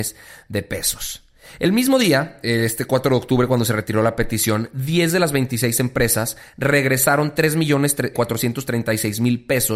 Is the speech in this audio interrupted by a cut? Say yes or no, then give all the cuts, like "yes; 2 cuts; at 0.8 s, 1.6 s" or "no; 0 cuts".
yes; 1 cut; at 8.1 s